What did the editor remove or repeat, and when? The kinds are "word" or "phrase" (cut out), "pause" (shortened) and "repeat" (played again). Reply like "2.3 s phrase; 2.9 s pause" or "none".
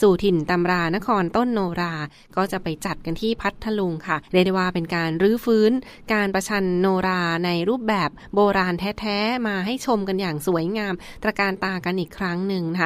4.3 s pause